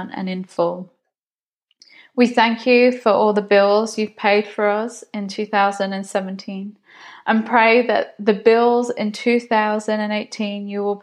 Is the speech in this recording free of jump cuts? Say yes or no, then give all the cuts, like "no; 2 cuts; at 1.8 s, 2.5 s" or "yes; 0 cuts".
yes; 0 cuts